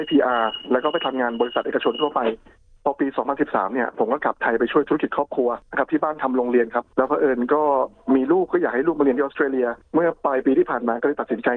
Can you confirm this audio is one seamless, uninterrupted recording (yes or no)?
yes